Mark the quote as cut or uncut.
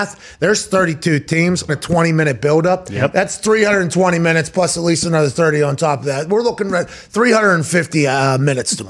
cut